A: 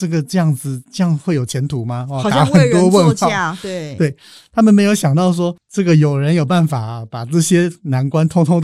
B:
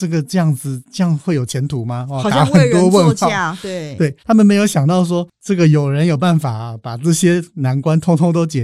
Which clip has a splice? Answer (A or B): B